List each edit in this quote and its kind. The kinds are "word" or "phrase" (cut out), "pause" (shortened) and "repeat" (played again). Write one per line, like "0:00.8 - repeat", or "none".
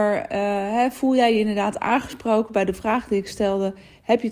none